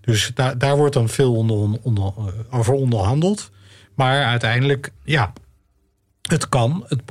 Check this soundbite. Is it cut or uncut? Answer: cut